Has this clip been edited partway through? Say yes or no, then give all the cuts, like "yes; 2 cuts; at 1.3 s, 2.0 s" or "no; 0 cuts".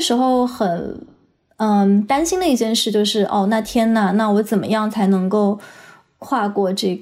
no; 0 cuts